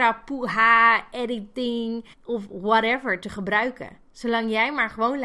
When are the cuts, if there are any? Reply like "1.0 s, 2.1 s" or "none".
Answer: 2.1 s